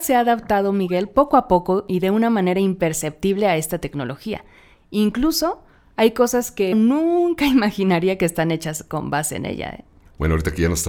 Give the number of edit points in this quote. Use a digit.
1